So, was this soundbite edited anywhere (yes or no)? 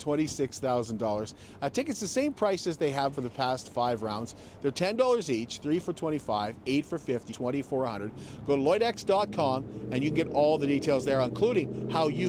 yes